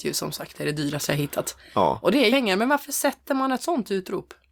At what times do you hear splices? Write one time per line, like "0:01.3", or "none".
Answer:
0:02.3

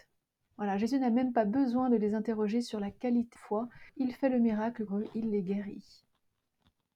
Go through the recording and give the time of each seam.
0:03.4
0:03.9
0:04.9

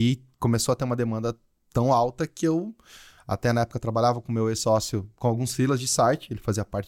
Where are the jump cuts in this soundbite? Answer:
none

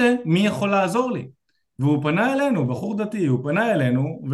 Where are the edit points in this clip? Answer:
none

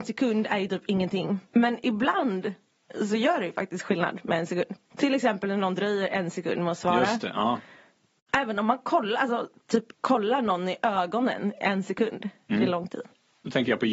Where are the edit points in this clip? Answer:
0:01.4
0:04.9
0:09.9

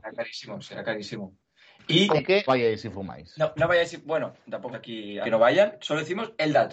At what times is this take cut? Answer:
0:02.1
0:02.5
0:04.7
0:05.2

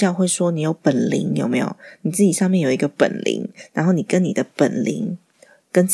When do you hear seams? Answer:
none

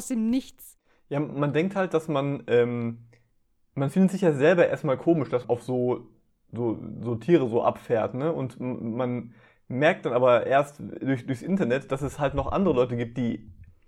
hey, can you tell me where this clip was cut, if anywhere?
0:05.4

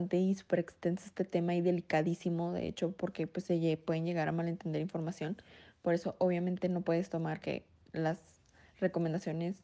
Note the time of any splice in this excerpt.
0:07.4

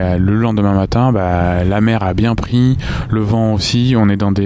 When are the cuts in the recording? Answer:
none

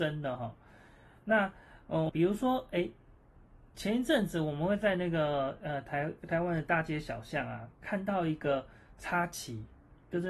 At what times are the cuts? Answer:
0:02.1

